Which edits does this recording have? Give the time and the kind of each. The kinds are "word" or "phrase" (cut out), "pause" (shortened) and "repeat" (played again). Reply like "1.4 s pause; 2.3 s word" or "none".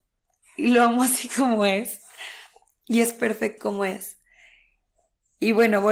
3.6 s word